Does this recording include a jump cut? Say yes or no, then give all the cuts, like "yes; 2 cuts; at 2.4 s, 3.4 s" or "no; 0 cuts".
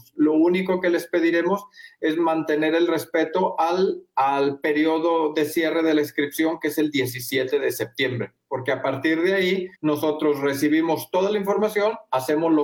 yes; 1 cut; at 9.7 s